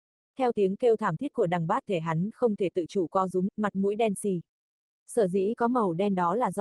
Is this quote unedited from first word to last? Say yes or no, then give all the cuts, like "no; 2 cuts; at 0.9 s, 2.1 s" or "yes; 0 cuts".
no; 2 cuts; at 1.9 s, 3.5 s